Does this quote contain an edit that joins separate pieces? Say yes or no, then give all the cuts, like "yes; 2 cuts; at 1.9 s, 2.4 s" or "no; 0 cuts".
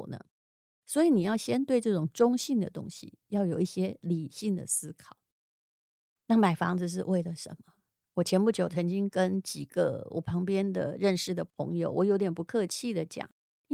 no; 0 cuts